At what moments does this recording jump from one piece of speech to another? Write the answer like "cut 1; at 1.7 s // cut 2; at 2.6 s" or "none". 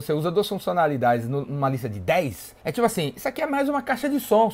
cut 1; at 2.6 s